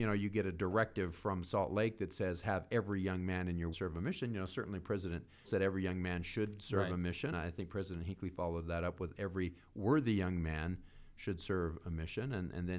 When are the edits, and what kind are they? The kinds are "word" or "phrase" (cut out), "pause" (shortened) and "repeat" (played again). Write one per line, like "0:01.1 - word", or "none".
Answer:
0:03.7 - word
0:05.4 - word
0:07.3 - word